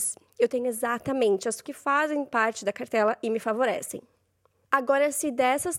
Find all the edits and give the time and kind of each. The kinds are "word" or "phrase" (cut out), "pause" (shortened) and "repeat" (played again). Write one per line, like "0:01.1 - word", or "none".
0:01.6 - word